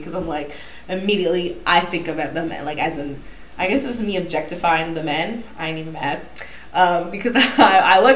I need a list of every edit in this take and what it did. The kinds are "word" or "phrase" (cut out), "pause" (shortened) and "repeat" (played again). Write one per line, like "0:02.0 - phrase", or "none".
none